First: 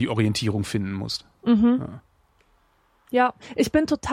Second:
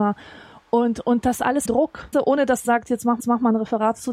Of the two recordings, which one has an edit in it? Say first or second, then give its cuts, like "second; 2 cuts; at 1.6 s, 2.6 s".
second; 4 cuts; at 1.7 s, 2.1 s, 2.6 s, 3.2 s